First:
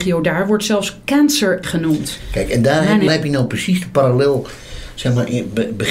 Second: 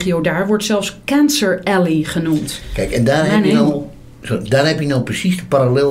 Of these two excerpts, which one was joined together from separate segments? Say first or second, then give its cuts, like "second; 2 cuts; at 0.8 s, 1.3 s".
first; 2 cuts; at 1.6 s, 3.1 s